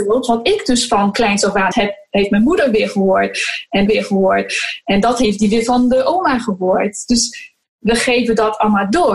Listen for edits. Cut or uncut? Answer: cut